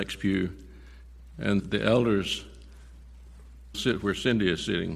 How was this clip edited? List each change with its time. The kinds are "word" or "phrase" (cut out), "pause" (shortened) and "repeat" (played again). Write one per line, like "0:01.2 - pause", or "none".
0:01.6 - word
0:03.7 - word